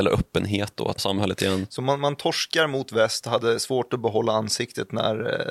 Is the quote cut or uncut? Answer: cut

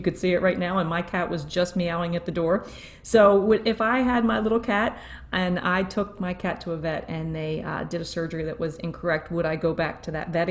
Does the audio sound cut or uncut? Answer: uncut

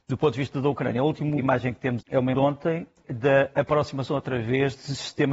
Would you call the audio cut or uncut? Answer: cut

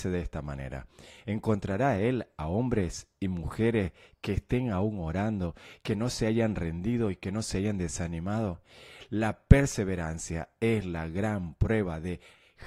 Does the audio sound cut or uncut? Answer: uncut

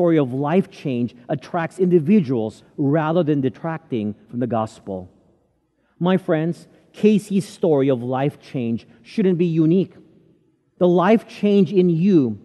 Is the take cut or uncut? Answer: uncut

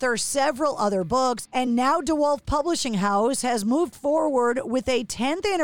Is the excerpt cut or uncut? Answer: uncut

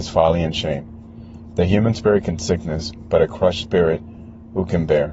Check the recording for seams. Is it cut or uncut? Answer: cut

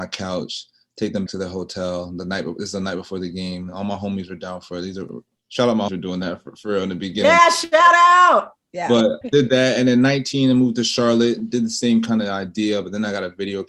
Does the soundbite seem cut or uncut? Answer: cut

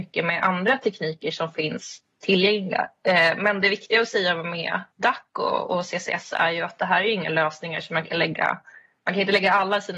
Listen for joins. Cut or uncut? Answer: cut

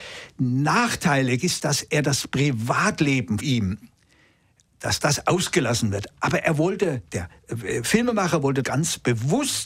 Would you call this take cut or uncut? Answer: cut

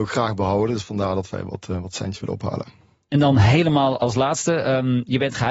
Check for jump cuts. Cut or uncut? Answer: uncut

